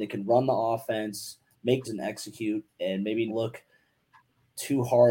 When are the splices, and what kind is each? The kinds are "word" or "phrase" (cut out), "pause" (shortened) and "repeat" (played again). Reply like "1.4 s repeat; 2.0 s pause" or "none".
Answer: 1.8 s word; 2.7 s word; 3.3 s word